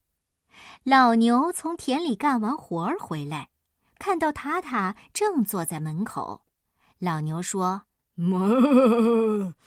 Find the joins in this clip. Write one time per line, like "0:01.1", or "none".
none

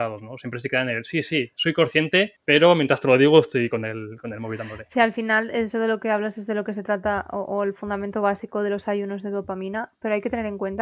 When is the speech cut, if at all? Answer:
0:02.4

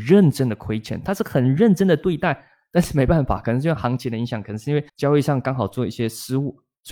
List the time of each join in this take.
0:04.9

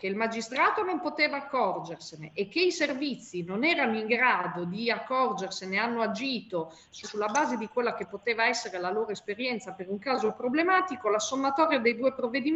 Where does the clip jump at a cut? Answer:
0:07.0

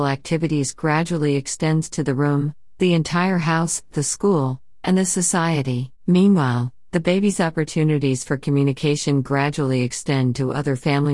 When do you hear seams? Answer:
0:06.0

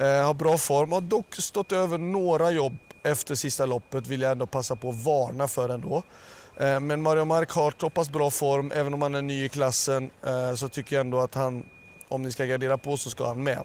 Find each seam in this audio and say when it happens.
none

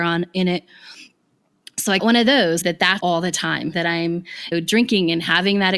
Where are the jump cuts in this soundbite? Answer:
0:02.0
0:02.6
0:03.0
0:03.7
0:04.5

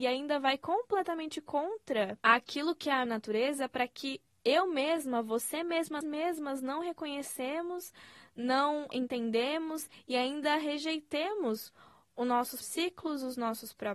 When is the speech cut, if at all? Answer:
0:03.1
0:06.0
0:08.9
0:12.6

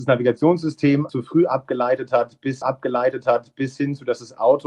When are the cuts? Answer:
0:01.1
0:02.6

